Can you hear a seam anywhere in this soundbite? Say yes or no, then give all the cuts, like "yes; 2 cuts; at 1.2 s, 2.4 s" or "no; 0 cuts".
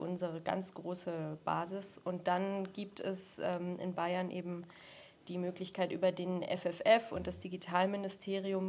no; 0 cuts